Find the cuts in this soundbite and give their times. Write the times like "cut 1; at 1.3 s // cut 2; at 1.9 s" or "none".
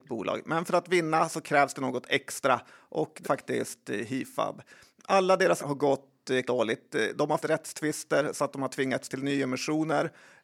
cut 1; at 3.2 s // cut 2; at 5.6 s // cut 3; at 6.4 s // cut 4; at 7.4 s